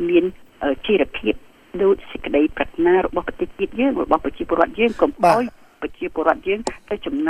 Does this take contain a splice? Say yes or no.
no